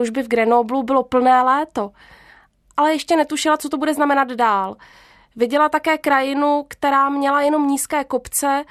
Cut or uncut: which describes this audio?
uncut